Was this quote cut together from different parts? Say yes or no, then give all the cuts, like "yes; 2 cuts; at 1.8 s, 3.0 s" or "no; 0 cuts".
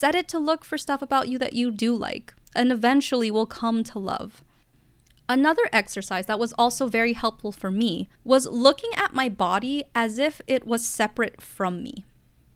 yes; 1 cut; at 8.2 s